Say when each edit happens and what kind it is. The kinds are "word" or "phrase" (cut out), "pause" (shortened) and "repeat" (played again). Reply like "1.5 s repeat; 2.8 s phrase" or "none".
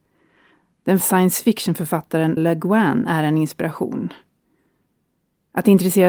1.0 s word; 2.4 s word